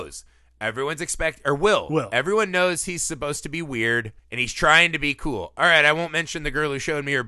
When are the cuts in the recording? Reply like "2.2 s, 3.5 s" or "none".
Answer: 4.2 s